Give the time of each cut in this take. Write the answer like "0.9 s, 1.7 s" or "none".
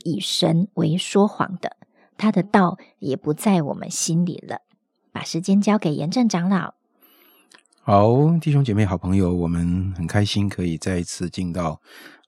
none